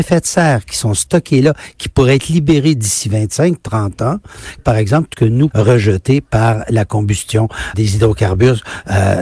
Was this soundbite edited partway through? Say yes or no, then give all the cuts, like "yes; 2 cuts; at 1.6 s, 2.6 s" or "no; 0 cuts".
yes; 4 cuts; at 4.6 s, 5.1 s, 5.5 s, 7.7 s